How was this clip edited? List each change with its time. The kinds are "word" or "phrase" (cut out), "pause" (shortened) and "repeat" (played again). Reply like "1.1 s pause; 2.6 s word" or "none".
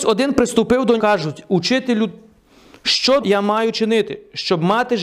1.0 s word; 3.2 s word

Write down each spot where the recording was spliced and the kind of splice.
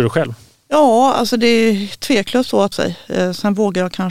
2.7 s phrase

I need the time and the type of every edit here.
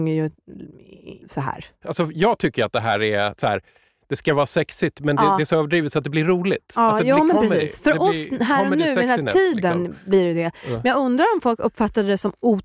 1.2 s pause

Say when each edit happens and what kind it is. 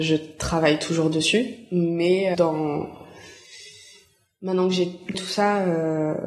2.3 s phrase; 5.1 s word

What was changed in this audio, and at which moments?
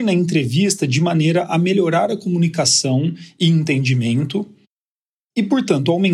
none

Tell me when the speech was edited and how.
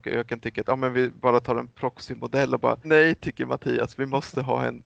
2.8 s word

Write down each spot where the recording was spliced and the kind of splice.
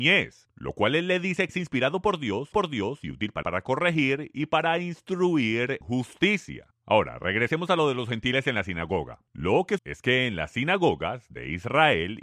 1.5 s word; 2.5 s repeat; 3.4 s word; 5.8 s word; 6.7 s pause; 9.3 s pause; 9.8 s phrase

